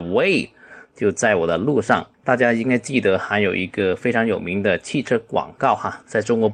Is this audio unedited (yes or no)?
no